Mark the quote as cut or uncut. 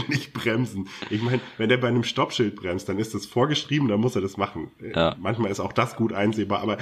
uncut